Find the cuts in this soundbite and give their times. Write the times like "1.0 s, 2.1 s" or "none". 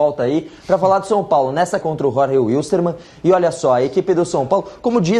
1.8 s